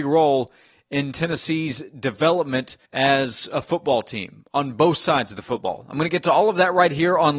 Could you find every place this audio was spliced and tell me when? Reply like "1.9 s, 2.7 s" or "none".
2.9 s